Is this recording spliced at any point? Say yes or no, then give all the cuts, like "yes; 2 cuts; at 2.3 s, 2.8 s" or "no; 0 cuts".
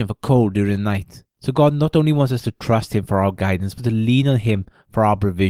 yes; 1 cut; at 3.8 s